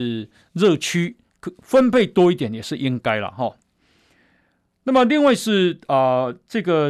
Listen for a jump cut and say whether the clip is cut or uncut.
uncut